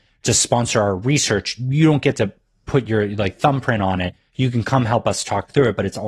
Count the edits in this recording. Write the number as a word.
zero